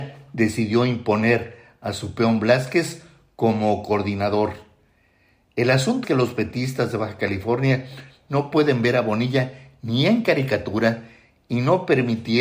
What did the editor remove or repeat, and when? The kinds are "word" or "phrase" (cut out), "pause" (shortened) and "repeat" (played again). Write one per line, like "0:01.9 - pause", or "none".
0:06.0 - word